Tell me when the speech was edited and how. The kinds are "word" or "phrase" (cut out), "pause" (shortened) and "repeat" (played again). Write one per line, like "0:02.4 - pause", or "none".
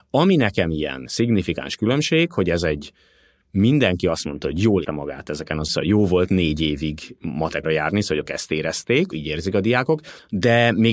0:04.8 - word
0:05.7 - word
0:07.6 - word
0:08.3 - word
0:09.1 - word